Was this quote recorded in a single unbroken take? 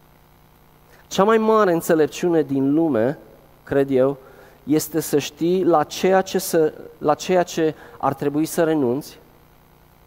yes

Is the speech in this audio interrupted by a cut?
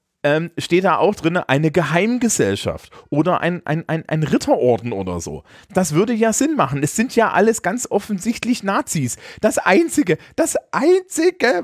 no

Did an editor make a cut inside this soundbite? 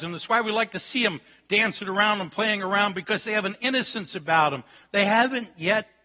no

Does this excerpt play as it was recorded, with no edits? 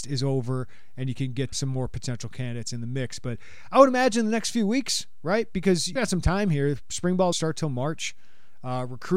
no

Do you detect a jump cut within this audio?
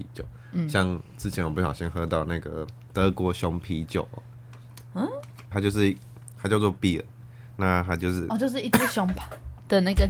yes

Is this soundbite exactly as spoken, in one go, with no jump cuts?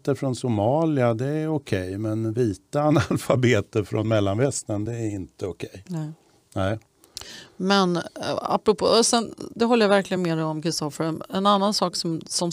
yes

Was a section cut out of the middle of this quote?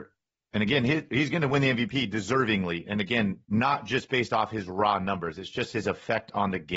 yes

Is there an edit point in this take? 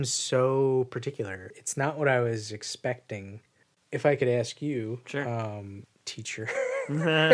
no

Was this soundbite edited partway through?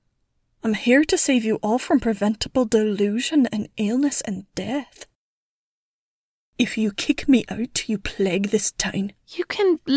no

